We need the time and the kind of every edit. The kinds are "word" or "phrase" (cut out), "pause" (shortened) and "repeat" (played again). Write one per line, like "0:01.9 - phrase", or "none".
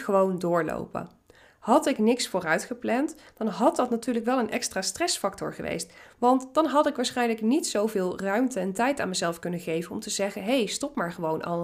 none